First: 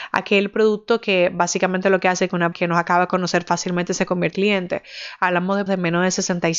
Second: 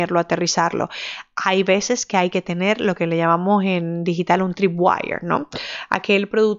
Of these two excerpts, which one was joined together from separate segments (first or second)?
first